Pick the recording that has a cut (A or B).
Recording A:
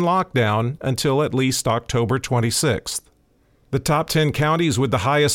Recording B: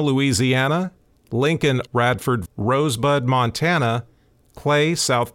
B